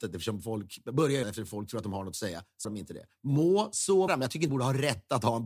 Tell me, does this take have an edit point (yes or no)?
yes